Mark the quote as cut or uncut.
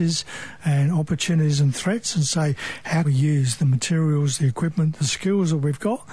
cut